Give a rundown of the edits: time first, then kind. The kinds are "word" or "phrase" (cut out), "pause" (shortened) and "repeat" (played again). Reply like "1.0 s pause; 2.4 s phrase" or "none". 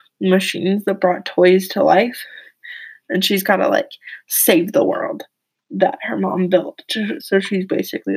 none